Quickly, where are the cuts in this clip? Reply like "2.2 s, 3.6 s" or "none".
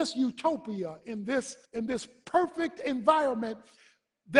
1.6 s